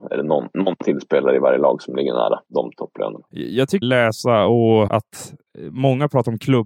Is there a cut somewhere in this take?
yes; 4 cuts; at 2.4 s, 3.3 s, 3.8 s, 4.9 s

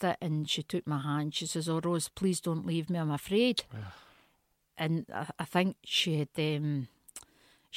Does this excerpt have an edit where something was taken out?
no; 0 cuts

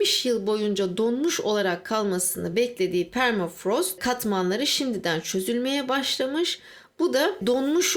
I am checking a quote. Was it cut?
no; 0 cuts

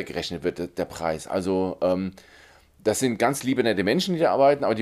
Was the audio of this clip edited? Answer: no; 0 cuts

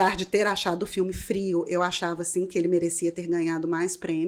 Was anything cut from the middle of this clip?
no; 0 cuts

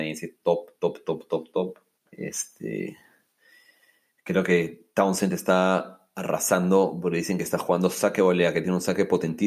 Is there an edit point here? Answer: yes; 2 cuts; at 2.0 s, 4.9 s

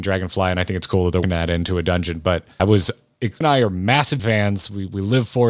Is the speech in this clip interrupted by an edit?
yes; 4 cuts; at 1.2 s, 2.6 s, 3.4 s, 4.2 s

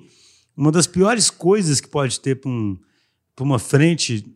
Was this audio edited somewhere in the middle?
no; 0 cuts

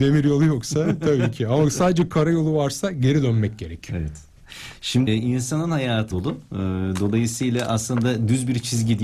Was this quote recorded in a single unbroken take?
no; 2 cuts; at 5.1 s, 6.1 s

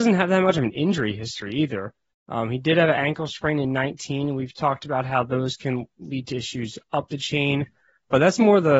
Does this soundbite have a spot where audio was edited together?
no; 0 cuts

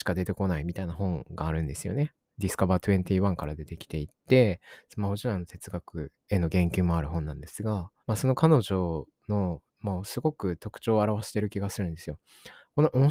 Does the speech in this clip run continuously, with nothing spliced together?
no; 3 cuts; at 4.2 s, 8.0 s, 9.7 s

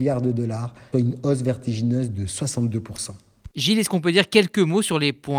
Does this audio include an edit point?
yes; 1 cut; at 0.9 s

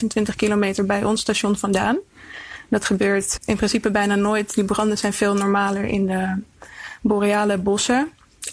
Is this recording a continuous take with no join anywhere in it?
no; 1 cut; at 3.4 s

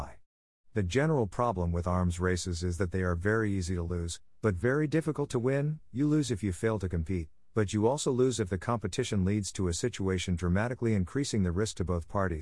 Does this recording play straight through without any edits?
yes; 0 cuts

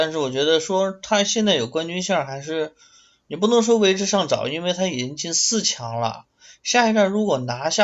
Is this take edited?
no; 0 cuts

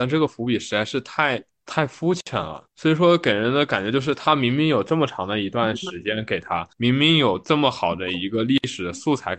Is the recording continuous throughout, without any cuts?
no; 3 cuts; at 1.5 s, 2.7 s, 6.7 s

